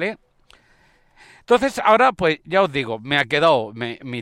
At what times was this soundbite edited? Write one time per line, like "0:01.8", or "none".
none